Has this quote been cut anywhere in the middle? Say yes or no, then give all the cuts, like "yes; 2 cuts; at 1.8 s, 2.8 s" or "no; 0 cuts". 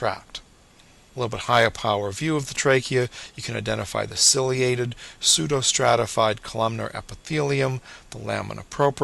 no; 0 cuts